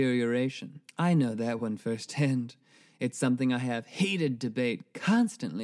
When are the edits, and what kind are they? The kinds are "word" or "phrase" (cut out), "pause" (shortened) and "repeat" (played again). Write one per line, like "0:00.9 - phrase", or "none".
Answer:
none

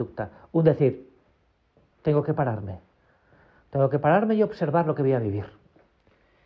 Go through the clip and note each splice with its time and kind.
none

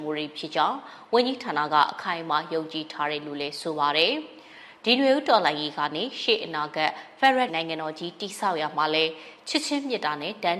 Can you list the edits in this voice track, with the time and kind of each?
0:07.5 - word

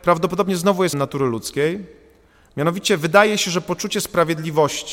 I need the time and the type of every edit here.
0:00.9 - word

